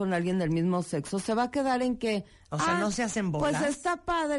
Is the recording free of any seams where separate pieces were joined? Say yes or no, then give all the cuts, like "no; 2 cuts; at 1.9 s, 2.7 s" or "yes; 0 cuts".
yes; 0 cuts